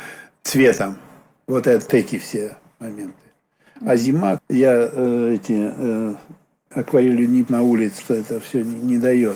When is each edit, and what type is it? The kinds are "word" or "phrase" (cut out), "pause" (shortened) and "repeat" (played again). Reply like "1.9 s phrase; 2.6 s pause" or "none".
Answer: 1.9 s word; 4.4 s word; 6.7 s word; 7.5 s word; 8.0 s word